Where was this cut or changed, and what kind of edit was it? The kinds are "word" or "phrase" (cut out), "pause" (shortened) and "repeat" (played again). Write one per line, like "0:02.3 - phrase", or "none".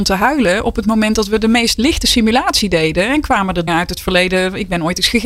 0:03.7 - word